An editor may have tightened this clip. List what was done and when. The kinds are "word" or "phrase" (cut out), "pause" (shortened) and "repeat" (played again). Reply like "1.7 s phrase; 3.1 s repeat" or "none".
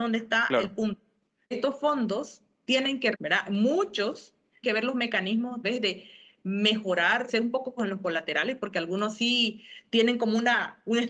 1.5 s word; 3.1 s word; 4.6 s word; 5.6 s word; 7.3 s word; 7.8 s word